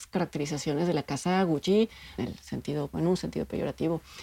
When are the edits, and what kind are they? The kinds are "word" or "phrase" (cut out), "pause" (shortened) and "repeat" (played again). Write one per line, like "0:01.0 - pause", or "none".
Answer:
0:02.2 - phrase
0:02.9 - word